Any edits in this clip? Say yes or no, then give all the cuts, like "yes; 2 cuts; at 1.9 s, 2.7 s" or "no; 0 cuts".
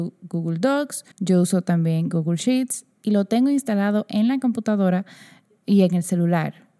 yes; 1 cut; at 1.1 s